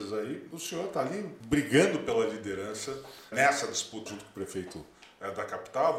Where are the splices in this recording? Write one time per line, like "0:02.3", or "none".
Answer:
0:01.4
0:03.3
0:04.1